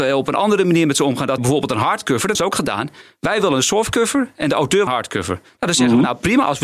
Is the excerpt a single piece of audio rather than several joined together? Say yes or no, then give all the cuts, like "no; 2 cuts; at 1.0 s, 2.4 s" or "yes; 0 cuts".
no; 3 cuts; at 1.4 s, 2.3 s, 4.9 s